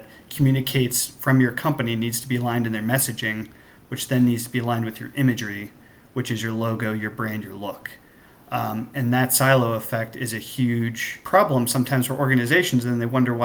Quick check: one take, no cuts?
yes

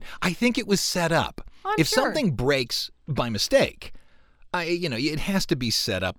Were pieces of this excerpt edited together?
yes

